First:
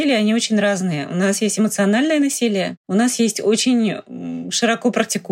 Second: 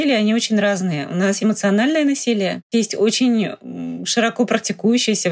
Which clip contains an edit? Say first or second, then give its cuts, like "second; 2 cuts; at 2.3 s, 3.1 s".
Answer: second; 2 cuts; at 1.4 s, 2.7 s